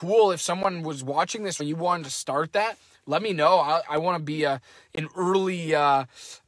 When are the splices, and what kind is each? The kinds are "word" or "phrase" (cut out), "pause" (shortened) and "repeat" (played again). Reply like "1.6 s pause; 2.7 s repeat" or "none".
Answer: 1.6 s phrase; 3.8 s word